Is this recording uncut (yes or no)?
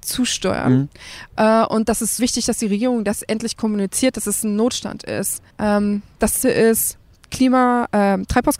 no